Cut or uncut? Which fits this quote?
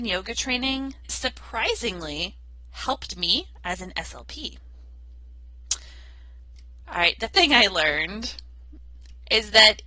cut